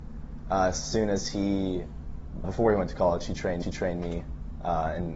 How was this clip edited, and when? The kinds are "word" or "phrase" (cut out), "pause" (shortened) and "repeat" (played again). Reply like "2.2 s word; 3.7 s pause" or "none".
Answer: 2.4 s word; 3.6 s repeat